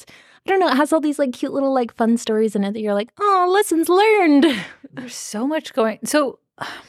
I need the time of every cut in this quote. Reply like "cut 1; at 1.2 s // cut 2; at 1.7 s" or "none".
none